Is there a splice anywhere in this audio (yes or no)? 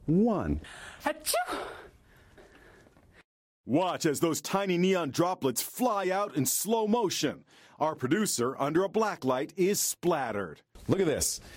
no